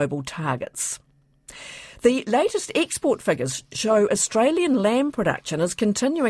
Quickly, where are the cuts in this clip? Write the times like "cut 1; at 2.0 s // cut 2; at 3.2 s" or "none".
none

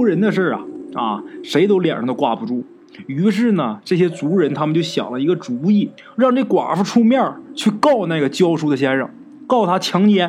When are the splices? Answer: cut 1; at 6.0 s

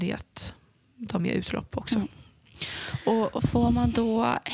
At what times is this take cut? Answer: cut 1; at 1.2 s

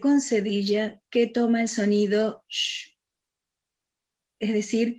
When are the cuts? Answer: none

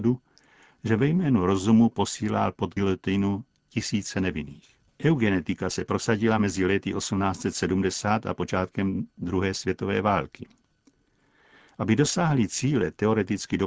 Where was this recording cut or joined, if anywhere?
none

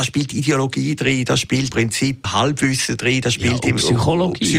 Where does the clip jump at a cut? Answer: cut 1; at 1.7 s // cut 2; at 2.2 s

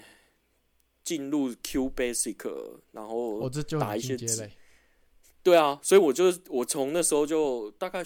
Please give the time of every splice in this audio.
none

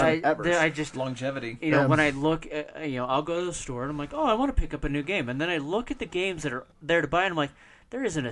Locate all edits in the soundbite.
cut 1; at 6.7 s

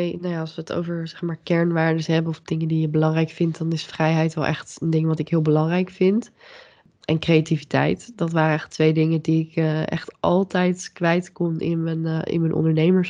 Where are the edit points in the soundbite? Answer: none

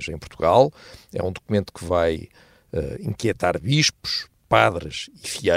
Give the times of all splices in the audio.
none

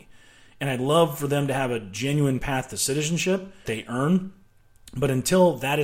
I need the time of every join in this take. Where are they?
cut 1; at 3.6 s

